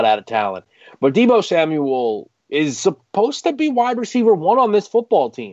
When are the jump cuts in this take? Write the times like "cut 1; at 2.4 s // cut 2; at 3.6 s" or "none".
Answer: cut 1; at 2.4 s